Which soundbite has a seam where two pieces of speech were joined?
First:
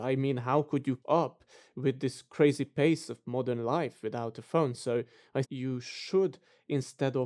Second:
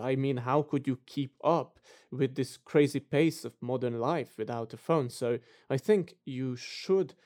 first; 2 cuts; at 1.0 s, 5.4 s

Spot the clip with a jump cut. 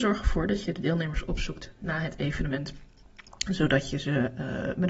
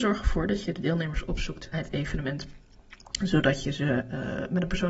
second; 1 cut; at 1.7 s

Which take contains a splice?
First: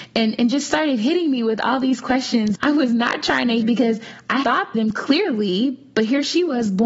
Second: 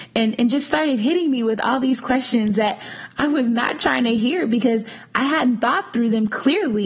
first; 4 cuts; at 2.5 s, 3.6 s, 4.4 s, 4.7 s

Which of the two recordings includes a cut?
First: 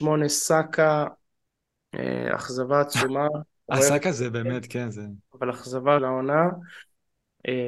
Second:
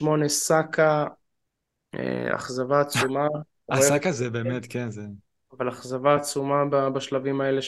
first; 2 cuts; at 5.3 s, 6.0 s

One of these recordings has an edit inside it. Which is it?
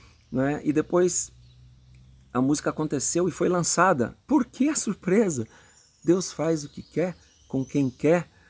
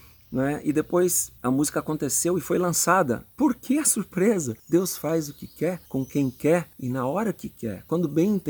second; 4 cuts; at 1.4 s, 4.6 s, 5.9 s, 6.7 s

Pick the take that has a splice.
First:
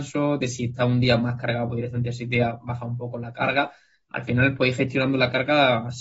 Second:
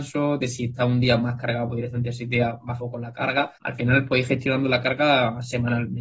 second; 2 cuts; at 2.8 s, 3.6 s

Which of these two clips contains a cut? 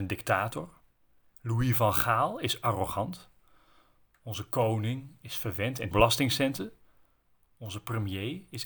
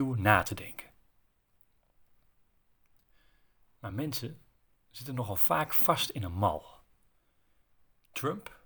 first; 1 cut; at 5.9 s

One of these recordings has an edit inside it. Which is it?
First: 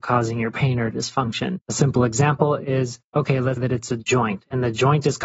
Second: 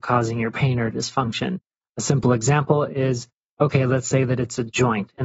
first; 3 cuts; at 1.6 s, 3.0 s, 3.6 s

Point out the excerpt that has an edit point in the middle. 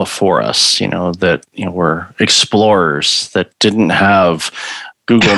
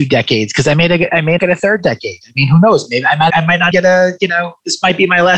second; 3 cuts; at 1.4 s, 3.3 s, 3.7 s

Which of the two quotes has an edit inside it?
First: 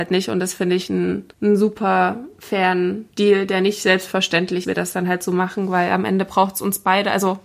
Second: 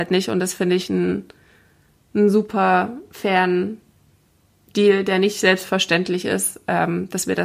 first; 3 cuts; at 1.3 s, 3.1 s, 4.6 s

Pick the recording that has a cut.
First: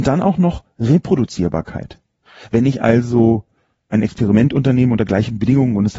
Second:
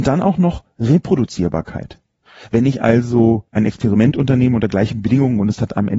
second; 1 cut; at 3.5 s

